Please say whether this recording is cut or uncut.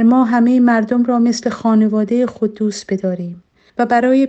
uncut